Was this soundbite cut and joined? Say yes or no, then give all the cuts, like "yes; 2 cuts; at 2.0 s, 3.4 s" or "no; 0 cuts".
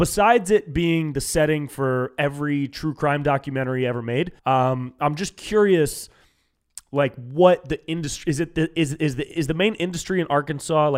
yes; 1 cut; at 4.4 s